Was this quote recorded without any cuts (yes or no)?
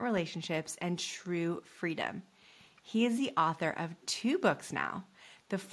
yes